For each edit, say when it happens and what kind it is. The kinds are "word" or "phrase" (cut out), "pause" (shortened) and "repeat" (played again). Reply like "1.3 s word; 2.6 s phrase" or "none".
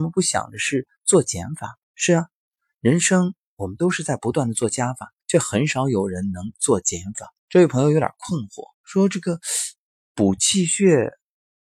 1.8 s pause; 5.2 s pause; 7.4 s pause; 8.7 s pause